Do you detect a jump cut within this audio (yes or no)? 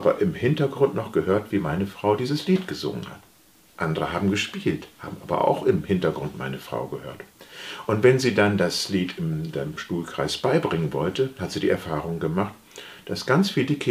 no